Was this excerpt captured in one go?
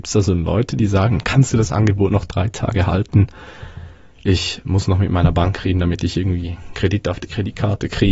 yes; 0 cuts

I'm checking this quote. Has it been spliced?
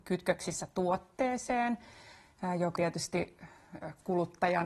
yes; 1 cut; at 2.8 s

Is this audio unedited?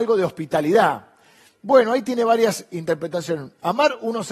yes; 0 cuts

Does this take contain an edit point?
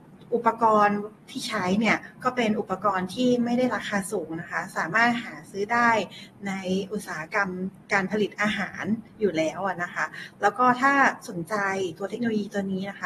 yes; 1 cut; at 7.8 s

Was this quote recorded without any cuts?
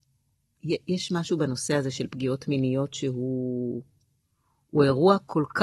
yes; 0 cuts

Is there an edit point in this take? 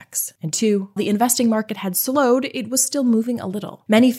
yes; 1 cut; at 1.0 s

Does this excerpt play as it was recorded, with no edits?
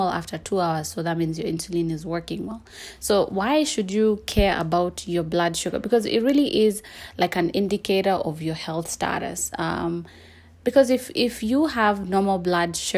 yes; 0 cuts

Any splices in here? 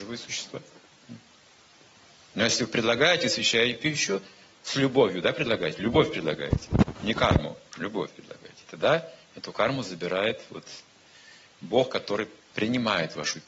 no; 0 cuts

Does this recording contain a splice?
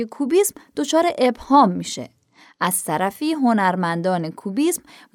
no; 0 cuts

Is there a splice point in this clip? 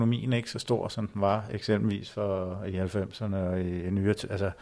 no; 0 cuts

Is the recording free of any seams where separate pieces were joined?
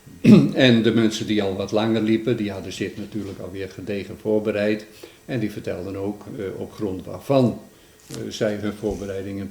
yes; 0 cuts

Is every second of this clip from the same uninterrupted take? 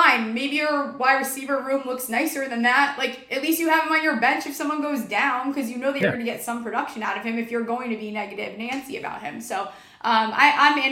yes; 0 cuts

